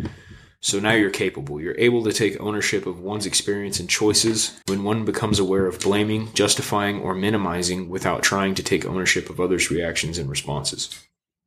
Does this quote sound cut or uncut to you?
cut